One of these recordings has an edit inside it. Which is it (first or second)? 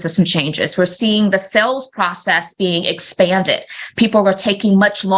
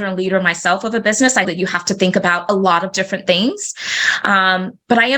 second